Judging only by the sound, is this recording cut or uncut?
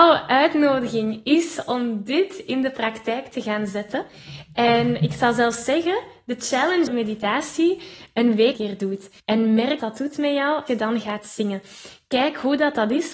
cut